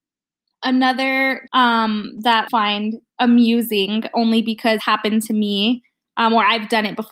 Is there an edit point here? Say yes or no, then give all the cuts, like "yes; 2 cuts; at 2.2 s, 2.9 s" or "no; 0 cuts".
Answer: yes; 4 cuts; at 1.5 s, 2.5 s, 3.1 s, 4.8 s